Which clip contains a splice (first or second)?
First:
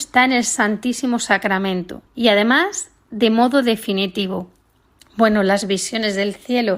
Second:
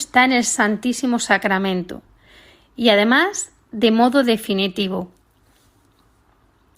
first